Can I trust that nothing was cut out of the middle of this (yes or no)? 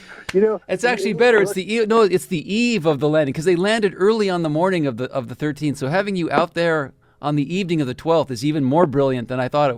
yes